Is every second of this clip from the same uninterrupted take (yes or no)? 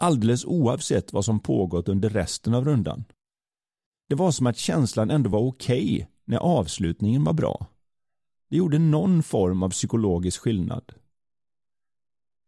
yes